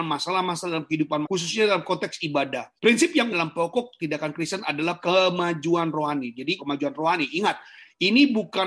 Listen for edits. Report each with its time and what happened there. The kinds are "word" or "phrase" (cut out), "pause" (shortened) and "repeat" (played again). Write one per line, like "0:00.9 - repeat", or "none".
0:01.2 - phrase
0:02.8 - pause
0:03.3 - word
0:05.0 - word
0:06.6 - phrase